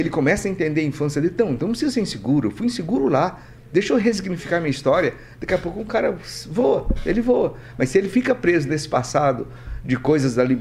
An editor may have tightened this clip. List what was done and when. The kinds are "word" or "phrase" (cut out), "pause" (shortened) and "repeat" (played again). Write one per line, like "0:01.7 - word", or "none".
none